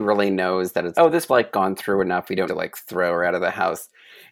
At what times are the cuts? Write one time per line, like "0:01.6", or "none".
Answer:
0:00.9
0:01.3
0:02.5

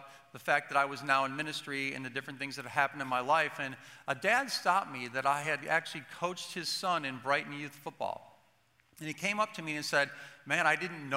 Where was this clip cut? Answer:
none

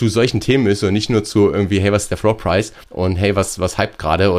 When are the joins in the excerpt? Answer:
0:02.8

